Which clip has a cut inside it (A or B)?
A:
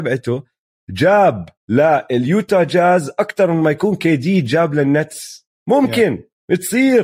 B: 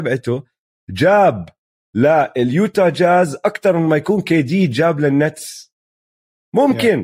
A